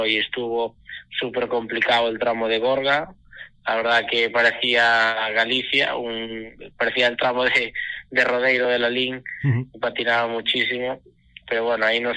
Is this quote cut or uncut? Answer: uncut